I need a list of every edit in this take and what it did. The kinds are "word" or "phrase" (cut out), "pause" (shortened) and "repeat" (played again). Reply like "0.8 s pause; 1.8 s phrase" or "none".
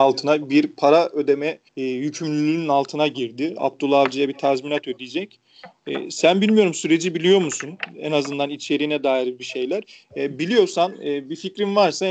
1.7 s pause

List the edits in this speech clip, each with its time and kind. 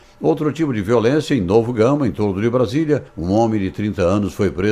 none

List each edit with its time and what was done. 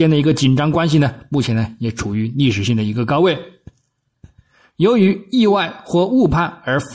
none

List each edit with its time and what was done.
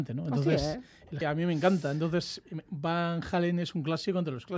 1.2 s word; 2.7 s word

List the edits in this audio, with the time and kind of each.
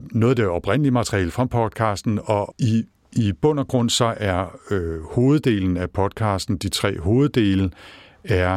none

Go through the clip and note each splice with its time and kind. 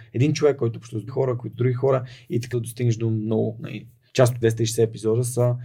1.1 s word; 1.5 s word; 2.5 s word; 4.4 s word

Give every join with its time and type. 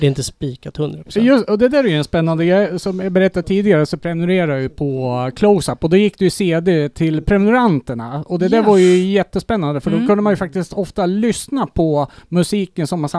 none

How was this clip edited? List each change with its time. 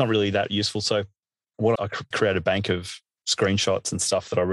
1.7 s phrase; 2.1 s word

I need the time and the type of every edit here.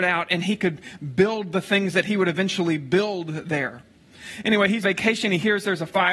4.8 s word

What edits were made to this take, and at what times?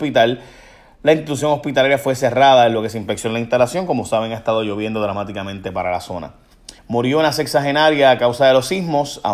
6.8 s pause

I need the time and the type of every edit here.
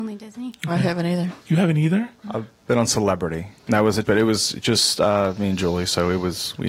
1.4 s pause; 2.2 s pause; 3.6 s pause; 4.0 s word

